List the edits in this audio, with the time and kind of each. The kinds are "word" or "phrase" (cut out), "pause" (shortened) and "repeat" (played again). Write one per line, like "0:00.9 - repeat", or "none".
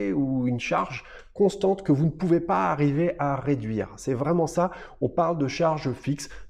none